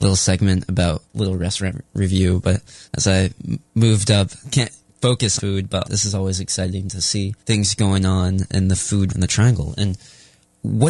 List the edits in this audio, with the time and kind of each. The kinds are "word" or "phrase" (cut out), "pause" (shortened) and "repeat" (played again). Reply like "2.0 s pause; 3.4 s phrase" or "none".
1.1 s phrase; 2.9 s pause; 4.4 s word; 5.4 s word; 5.8 s word; 7.4 s pause; 9.1 s word